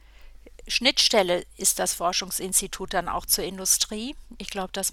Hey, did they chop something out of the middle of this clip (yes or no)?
no